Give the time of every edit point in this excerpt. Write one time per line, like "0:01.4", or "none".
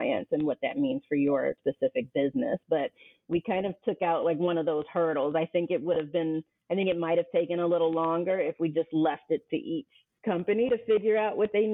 none